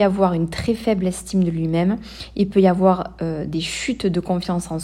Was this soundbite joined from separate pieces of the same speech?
no; 0 cuts

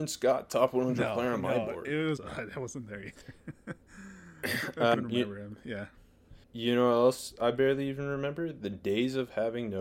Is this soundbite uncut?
no; 3 cuts; at 2.2 s, 4.9 s, 6.4 s

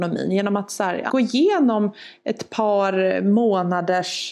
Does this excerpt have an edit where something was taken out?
yes; 1 cut; at 1.1 s

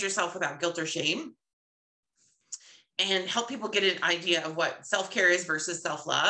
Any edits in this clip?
no; 0 cuts

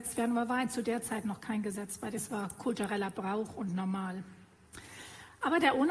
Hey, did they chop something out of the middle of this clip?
yes; 1 cut; at 2.2 s

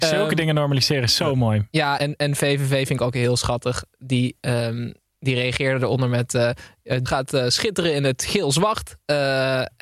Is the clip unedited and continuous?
no; 2 cuts; at 2.0 s, 7.1 s

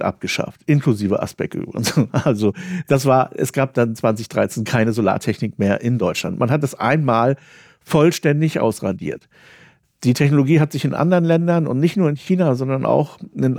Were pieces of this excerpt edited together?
no; 0 cuts

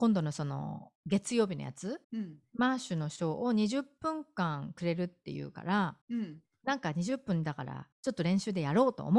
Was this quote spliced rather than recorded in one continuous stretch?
yes; 4 cuts; at 1.0 s, 2.0 s, 6.0 s, 7.9 s

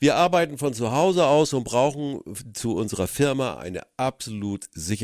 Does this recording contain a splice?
no; 0 cuts

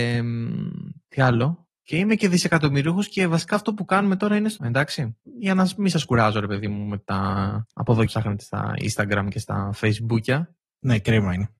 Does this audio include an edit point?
yes; 3 cuts; at 1.8 s, 4.6 s, 8.1 s

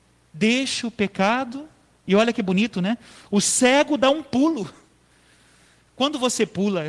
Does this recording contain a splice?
no; 0 cuts

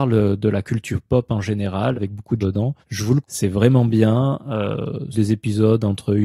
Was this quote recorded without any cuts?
no; 5 cuts; at 1.9 s, 2.4 s, 2.8 s, 3.2 s, 5.1 s

